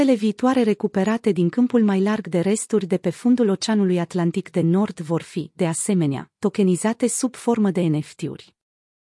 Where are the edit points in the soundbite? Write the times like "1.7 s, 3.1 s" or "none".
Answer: none